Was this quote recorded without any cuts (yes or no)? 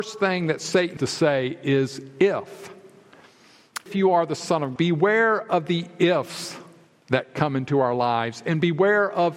no